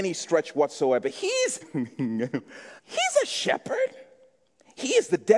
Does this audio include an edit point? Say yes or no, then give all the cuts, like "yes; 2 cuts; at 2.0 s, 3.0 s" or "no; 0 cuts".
yes; 2 cuts; at 1.6 s, 2.8 s